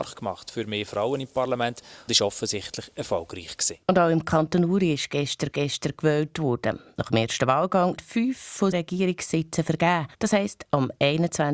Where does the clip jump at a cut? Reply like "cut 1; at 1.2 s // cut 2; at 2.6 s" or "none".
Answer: cut 1; at 2.1 s // cut 2; at 3.8 s // cut 3; at 5.5 s // cut 4; at 8.0 s // cut 5; at 8.7 s // cut 6; at 10.1 s

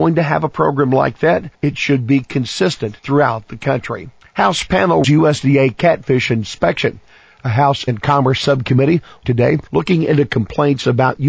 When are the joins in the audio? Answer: cut 1; at 1.5 s // cut 2; at 3.0 s // cut 3; at 4.2 s // cut 4; at 5.0 s // cut 5; at 7.9 s // cut 6; at 9.2 s // cut 7; at 9.7 s

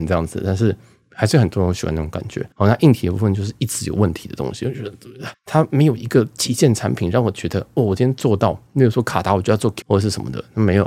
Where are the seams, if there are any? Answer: cut 1; at 2.5 s // cut 2; at 5.3 s // cut 3; at 9.8 s

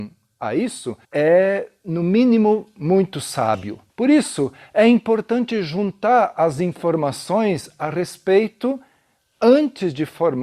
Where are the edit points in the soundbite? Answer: cut 1; at 1.0 s // cut 2; at 3.9 s

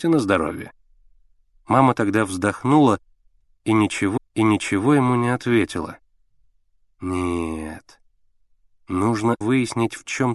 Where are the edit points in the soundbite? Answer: cut 1; at 4.2 s // cut 2; at 9.4 s

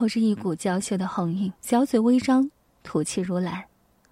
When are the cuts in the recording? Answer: cut 1; at 1.6 s

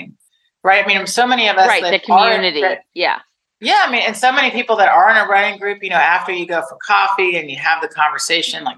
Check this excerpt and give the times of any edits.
none

